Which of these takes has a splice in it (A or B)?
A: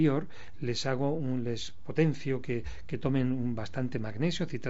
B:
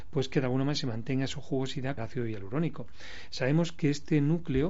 B